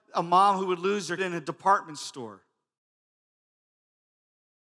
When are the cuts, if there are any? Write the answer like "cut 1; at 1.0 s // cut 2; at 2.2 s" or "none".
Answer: cut 1; at 1.2 s